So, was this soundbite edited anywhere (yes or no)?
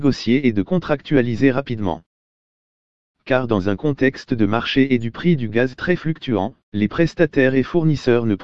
no